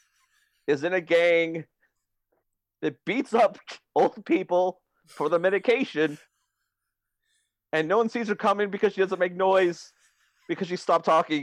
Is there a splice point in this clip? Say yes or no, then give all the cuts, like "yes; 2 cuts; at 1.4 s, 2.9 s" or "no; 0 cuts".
yes; 2 cuts; at 2.4 s, 6.3 s